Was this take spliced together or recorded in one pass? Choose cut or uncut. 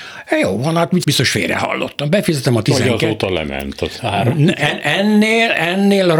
cut